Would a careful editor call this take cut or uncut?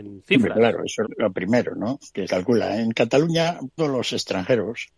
cut